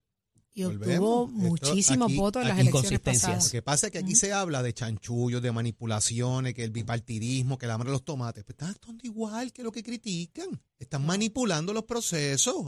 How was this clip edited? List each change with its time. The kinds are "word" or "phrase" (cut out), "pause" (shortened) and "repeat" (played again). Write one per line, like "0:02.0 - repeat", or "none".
0:10.7 - pause

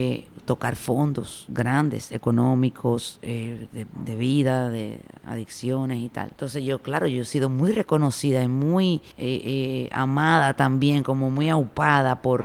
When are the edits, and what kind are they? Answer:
0:06.3 - pause
0:09.1 - pause

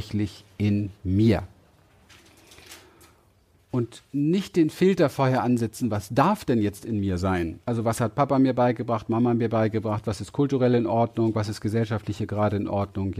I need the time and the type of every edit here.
0:07.6 - pause

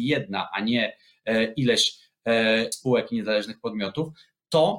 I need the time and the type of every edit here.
0:02.7 - word

